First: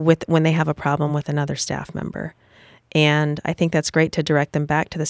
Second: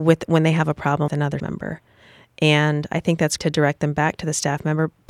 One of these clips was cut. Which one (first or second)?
second